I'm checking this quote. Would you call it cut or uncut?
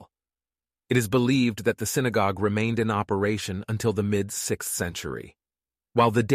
uncut